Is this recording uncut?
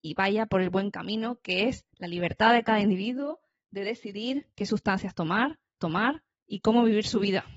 no; 2 cuts; at 1.9 s, 5.8 s

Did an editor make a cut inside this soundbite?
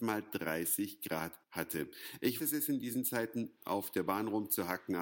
yes; 3 cuts; at 1.4 s, 2.4 s, 3.6 s

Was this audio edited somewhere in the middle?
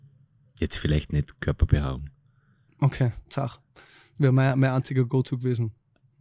no; 0 cuts

